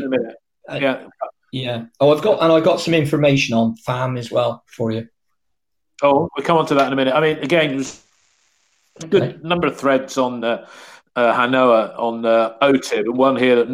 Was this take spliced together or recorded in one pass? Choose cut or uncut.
uncut